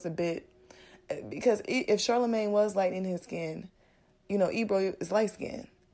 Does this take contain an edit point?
no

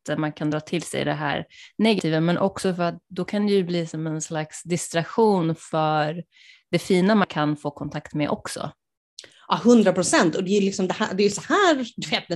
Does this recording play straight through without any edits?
yes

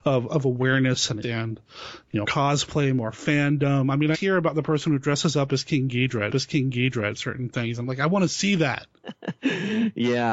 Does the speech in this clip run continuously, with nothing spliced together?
no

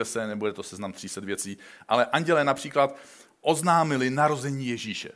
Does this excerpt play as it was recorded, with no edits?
yes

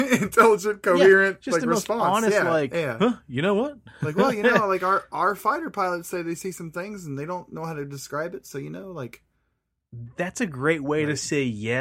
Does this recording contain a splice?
no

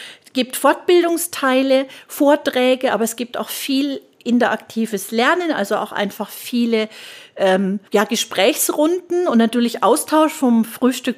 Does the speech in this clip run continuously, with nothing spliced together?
no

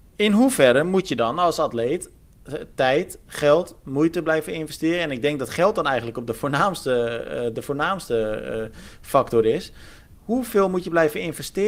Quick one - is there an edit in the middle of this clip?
no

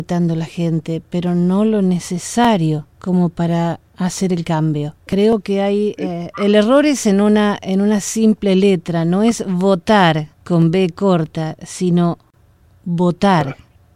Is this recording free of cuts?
no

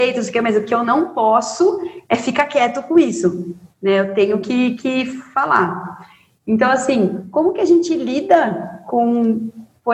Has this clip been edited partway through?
no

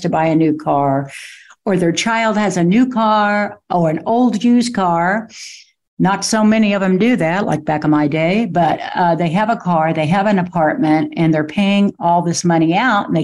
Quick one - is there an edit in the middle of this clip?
no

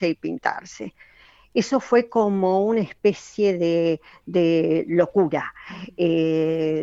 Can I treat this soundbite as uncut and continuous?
yes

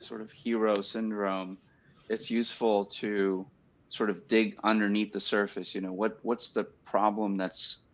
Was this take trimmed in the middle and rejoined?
no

